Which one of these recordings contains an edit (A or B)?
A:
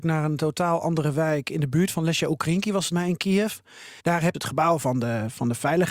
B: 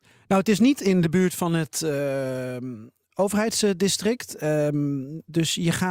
A